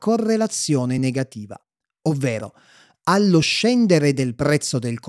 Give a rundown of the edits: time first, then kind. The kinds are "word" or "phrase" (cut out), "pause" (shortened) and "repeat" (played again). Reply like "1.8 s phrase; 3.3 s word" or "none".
none